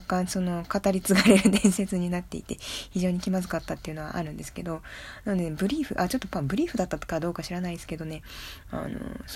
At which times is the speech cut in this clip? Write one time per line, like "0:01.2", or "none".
none